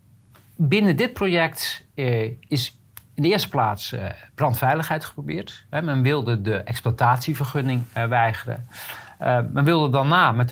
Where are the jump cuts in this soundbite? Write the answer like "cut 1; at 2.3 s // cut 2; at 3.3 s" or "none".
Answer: none